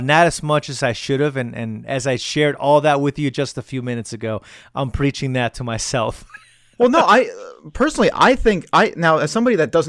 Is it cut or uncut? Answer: uncut